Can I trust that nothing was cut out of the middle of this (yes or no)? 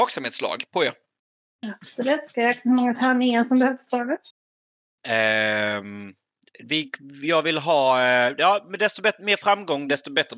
yes